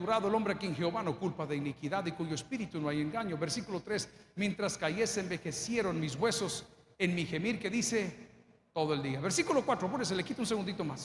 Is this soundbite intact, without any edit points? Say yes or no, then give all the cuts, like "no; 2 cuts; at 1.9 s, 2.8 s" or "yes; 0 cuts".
yes; 0 cuts